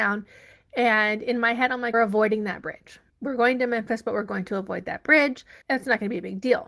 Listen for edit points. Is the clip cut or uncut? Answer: cut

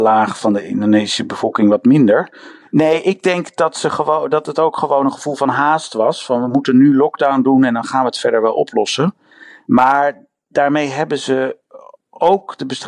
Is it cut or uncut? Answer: uncut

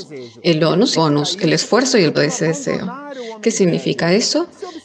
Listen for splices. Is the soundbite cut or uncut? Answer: cut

